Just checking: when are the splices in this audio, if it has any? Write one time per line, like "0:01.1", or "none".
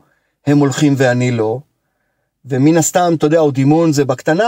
none